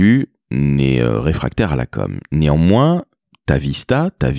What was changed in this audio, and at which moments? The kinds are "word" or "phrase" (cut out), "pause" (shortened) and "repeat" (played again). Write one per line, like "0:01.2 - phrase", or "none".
none